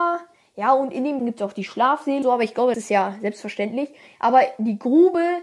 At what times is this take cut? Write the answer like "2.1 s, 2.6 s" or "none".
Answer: 1.2 s, 2.2 s, 2.7 s